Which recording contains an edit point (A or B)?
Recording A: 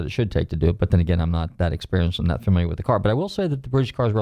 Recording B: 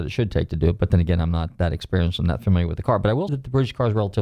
B